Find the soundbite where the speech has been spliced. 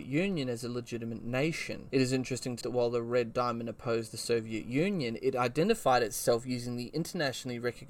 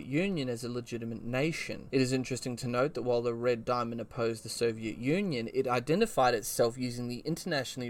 first; 1 cut; at 2.6 s

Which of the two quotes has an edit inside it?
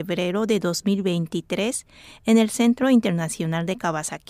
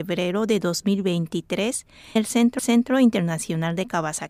second; 2 cuts; at 2.2 s, 2.6 s

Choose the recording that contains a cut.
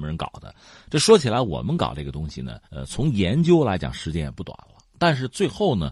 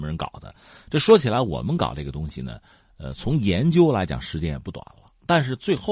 first; 1 cut; at 2.6 s

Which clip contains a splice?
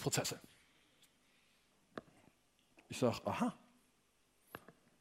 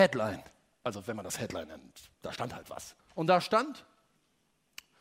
second; 2 cuts; at 2.1 s, 3.0 s

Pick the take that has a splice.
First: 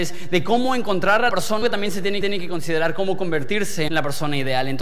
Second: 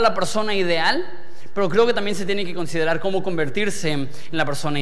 first; 4 cuts; at 1.3 s, 1.6 s, 2.2 s, 3.9 s

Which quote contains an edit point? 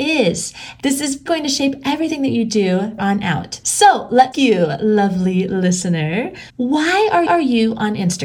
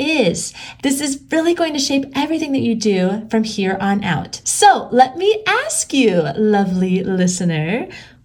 first; 5 cuts; at 1.3 s, 3.0 s, 4.3 s, 6.5 s, 7.3 s

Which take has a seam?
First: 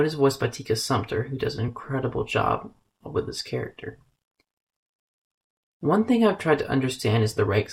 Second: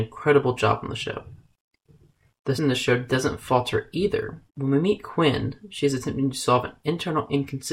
second; 2 cuts; at 2.6 s, 4.5 s

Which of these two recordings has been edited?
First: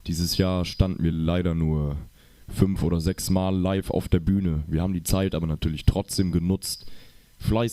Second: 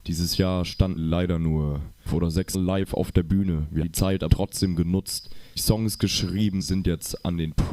second; 7 cuts; at 1.0 s, 2.1 s, 2.5 s, 3.8 s, 4.3 s, 5.6 s, 6.6 s

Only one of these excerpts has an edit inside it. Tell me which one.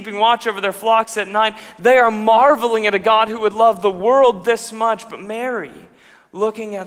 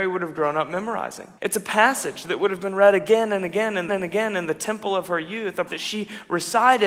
second; 3 cuts; at 1.4 s, 3.9 s, 5.7 s

